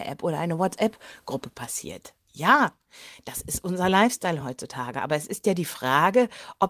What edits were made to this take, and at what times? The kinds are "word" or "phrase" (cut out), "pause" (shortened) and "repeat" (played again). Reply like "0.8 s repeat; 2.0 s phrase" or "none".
none